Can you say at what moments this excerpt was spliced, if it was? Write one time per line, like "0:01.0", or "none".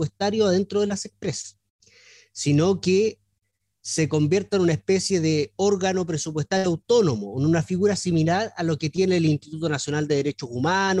none